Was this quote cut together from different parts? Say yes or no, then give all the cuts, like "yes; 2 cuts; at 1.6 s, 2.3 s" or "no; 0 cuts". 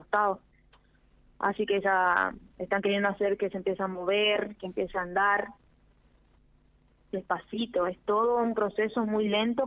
no; 0 cuts